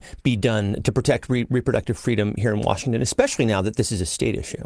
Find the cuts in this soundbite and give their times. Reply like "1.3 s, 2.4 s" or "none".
none